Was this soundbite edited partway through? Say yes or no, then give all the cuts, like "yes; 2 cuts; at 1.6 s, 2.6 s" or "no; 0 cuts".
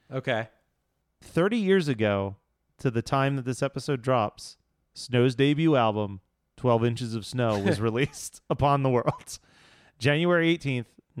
no; 0 cuts